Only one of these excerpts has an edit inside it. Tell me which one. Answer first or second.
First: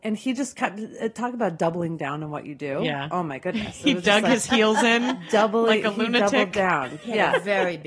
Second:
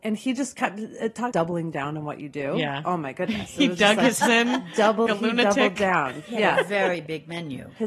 second